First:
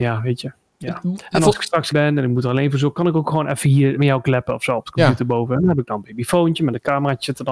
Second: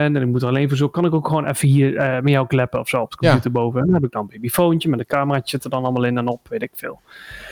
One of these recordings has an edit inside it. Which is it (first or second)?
first